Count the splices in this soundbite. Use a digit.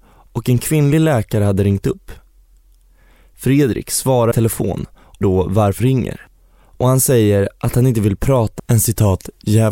4